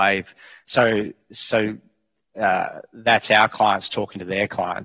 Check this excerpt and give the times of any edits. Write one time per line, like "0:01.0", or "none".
none